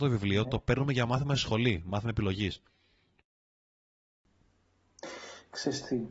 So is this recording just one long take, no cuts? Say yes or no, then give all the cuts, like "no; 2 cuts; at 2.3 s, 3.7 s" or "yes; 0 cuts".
yes; 0 cuts